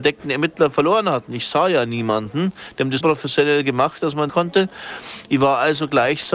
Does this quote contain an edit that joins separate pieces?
yes; 2 cuts; at 3.0 s, 4.3 s

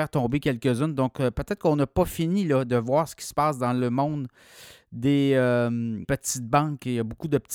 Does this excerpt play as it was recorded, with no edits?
no; 1 cut; at 6.0 s

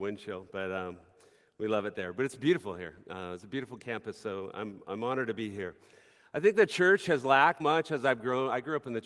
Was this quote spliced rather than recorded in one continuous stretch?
yes; 1 cut; at 7.6 s

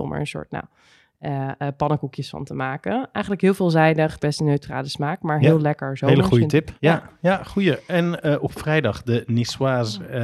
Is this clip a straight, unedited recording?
no; 2 cuts; at 4.2 s, 6.8 s

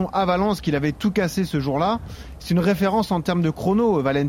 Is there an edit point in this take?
no; 0 cuts

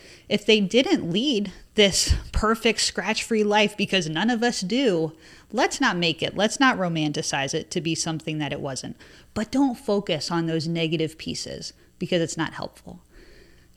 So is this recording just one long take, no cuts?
yes; 0 cuts

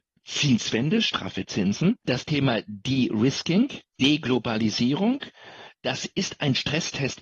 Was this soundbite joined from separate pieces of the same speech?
yes; 1 cut; at 5.8 s

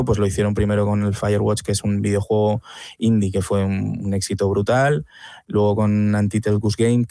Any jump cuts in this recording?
no; 0 cuts

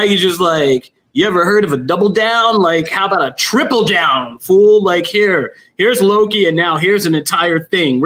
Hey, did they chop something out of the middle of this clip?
no; 0 cuts

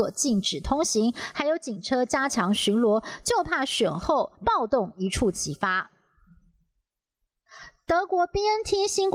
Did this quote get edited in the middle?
yes; 1 cut; at 4.3 s

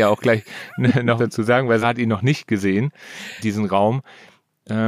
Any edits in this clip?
yes; 3 cuts; at 1.2 s, 1.8 s, 3.4 s

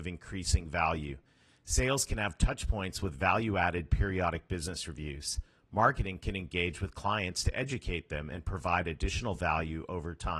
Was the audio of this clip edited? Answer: no; 0 cuts

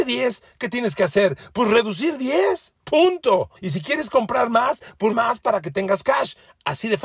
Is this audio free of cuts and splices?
no; 2 cuts; at 3.6 s, 5.1 s

